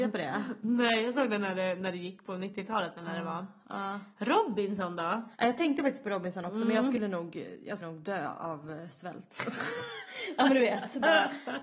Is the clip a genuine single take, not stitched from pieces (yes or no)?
no